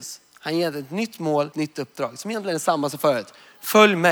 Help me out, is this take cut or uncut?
cut